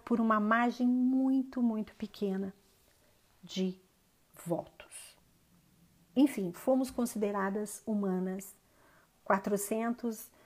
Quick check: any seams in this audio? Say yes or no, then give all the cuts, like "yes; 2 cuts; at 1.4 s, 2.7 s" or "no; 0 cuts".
no; 0 cuts